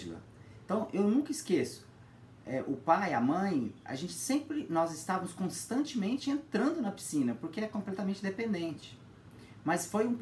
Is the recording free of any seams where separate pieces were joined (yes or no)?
yes